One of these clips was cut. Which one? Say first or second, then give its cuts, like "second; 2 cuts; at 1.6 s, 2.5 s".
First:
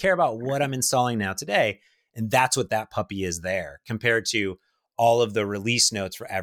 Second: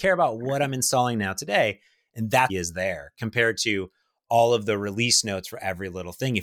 second; 1 cut; at 2.5 s